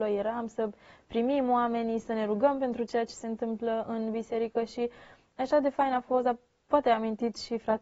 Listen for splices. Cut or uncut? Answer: uncut